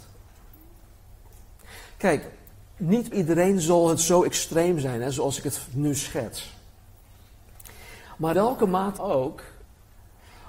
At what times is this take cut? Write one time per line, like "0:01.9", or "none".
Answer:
0:03.1
0:08.3
0:09.0